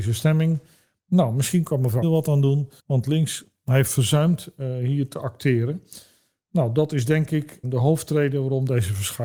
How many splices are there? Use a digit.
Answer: 3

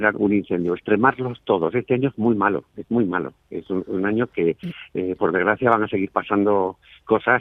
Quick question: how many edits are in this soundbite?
0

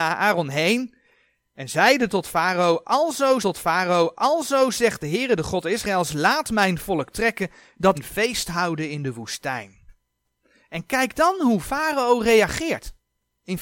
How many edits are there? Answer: 2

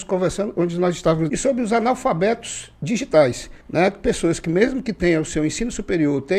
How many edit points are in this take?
2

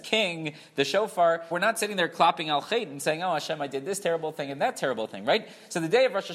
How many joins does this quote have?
1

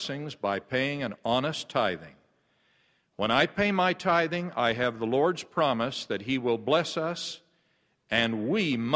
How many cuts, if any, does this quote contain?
0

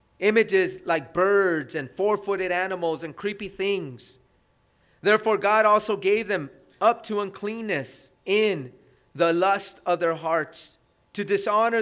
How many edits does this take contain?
1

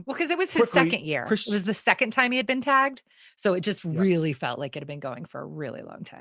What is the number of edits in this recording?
0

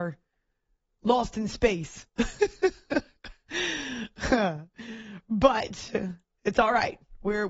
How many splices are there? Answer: 0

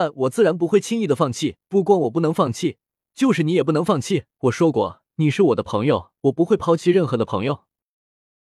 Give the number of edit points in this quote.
4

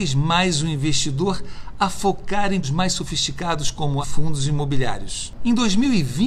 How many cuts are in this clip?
2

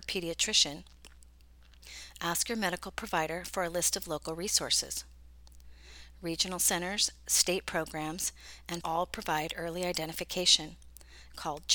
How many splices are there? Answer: 1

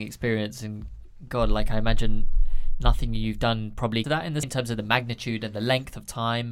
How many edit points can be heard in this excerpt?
2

